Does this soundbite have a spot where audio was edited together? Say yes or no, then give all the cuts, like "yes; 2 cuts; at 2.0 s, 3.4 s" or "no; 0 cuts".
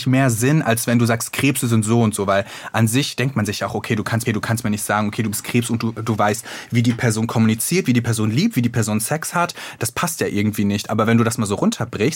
yes; 1 cut; at 4.3 s